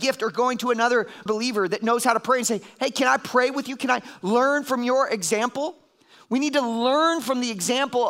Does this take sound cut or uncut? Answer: cut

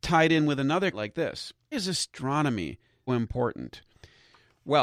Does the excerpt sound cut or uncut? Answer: cut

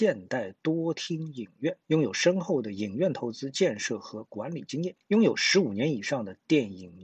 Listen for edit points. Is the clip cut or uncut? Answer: cut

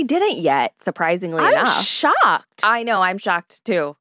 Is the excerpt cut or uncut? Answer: uncut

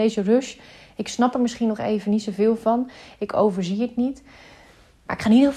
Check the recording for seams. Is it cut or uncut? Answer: uncut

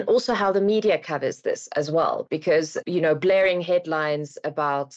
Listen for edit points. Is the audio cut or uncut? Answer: uncut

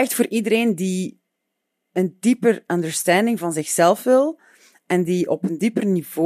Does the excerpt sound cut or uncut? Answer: uncut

